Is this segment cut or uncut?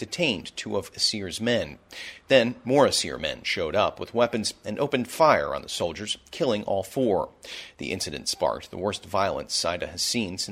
uncut